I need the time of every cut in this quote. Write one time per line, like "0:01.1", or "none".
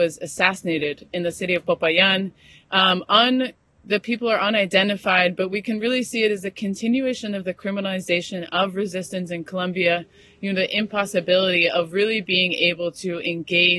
none